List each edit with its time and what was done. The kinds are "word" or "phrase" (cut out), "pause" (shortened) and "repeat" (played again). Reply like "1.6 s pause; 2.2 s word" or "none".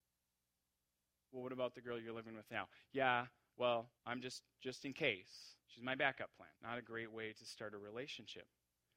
4.0 s pause; 5.6 s pause; 6.6 s pause

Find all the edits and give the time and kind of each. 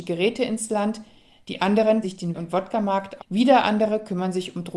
2.0 s word; 2.3 s word; 3.2 s word

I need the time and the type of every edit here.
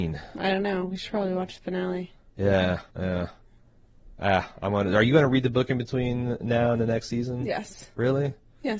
2.9 s pause

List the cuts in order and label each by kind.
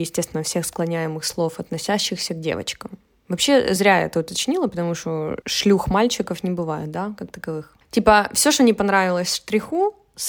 none

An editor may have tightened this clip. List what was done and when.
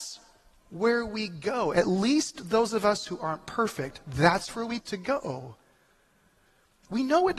4.8 s word

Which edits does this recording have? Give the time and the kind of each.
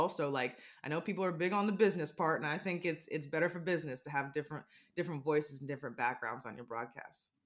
none

